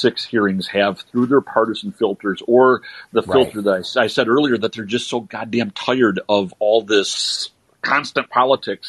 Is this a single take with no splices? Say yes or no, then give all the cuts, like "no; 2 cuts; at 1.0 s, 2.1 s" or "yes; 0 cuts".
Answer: yes; 0 cuts